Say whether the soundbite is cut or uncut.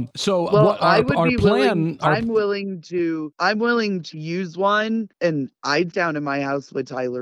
cut